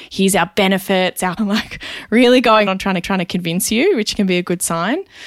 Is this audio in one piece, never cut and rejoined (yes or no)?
no